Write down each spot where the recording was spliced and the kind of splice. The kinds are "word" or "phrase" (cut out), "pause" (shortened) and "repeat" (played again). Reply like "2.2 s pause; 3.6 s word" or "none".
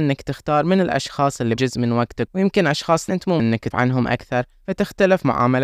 1.6 s word; 2.3 s word; 3.1 s word; 3.4 s word; 3.7 s word